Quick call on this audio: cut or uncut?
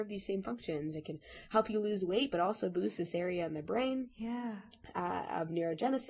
uncut